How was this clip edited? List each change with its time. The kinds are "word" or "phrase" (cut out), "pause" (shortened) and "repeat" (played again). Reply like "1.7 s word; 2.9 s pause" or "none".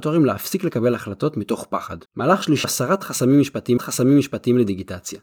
2.0 s pause; 2.6 s word; 3.8 s repeat